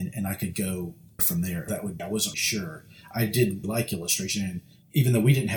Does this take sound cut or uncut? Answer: cut